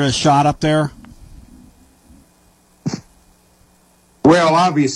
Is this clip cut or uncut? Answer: uncut